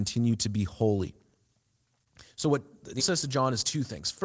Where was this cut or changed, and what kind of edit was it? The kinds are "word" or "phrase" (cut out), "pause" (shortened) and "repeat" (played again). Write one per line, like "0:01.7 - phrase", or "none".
0:03.0 - word